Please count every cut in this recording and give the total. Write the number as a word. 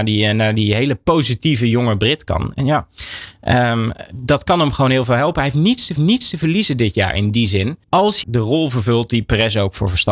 three